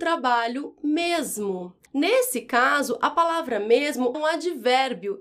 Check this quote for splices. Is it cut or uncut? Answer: cut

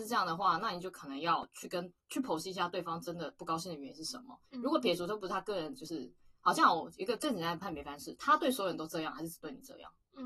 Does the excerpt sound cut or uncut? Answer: cut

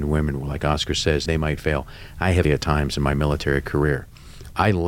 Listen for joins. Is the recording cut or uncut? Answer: cut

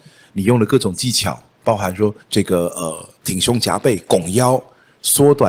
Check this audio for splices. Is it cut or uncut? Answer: cut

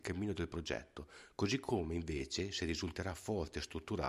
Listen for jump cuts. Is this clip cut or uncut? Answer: uncut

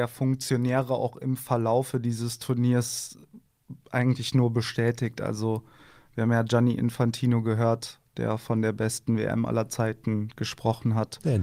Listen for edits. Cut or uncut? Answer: uncut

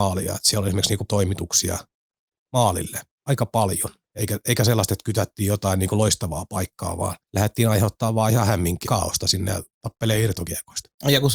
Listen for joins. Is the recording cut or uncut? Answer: cut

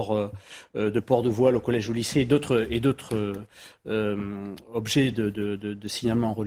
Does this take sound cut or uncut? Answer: uncut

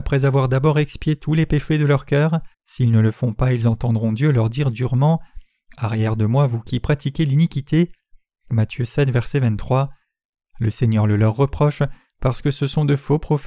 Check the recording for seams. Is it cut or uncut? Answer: cut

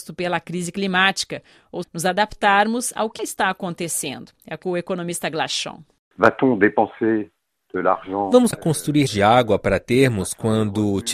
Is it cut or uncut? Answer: cut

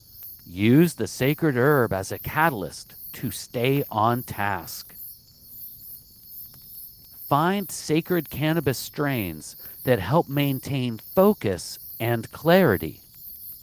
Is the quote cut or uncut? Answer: uncut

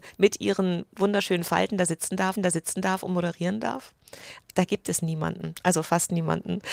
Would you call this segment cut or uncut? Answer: cut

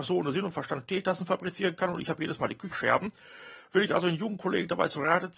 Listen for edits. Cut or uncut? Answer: cut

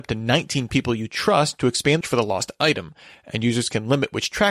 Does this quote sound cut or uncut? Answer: cut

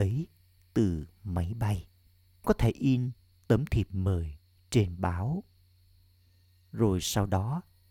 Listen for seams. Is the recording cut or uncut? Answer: cut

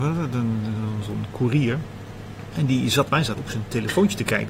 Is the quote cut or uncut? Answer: cut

